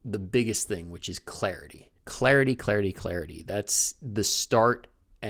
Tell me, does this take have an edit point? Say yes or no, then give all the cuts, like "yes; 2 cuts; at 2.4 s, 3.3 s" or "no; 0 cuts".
yes; 1 cut; at 2.0 s